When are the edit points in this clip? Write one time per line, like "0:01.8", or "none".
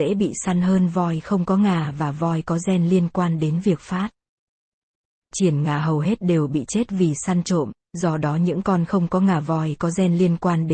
none